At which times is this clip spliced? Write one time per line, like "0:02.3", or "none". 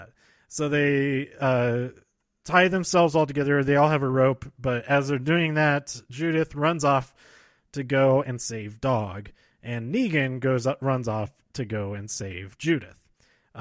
none